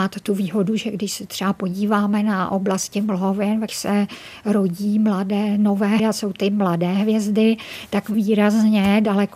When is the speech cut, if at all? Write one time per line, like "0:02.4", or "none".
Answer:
0:03.7
0:06.0
0:06.3
0:08.1